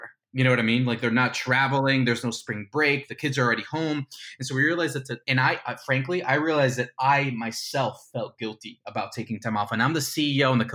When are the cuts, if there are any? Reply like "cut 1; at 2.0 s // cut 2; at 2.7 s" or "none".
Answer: cut 1; at 5.2 s